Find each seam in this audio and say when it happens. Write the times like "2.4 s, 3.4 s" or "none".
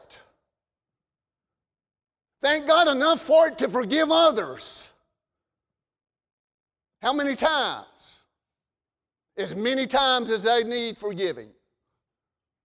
none